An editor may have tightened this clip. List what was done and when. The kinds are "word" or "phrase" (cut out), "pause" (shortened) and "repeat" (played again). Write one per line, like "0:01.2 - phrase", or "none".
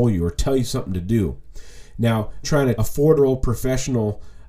0:02.4 - word
0:02.8 - word
0:03.2 - word